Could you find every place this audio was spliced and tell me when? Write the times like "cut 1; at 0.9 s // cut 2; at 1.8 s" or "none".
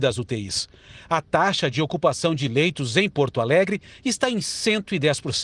none